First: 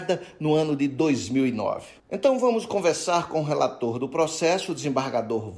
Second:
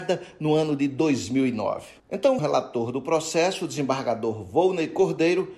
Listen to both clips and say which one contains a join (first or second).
second